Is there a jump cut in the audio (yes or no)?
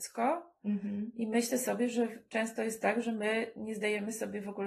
no